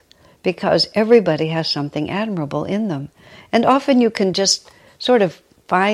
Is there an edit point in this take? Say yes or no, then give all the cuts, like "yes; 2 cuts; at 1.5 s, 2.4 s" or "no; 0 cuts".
no; 0 cuts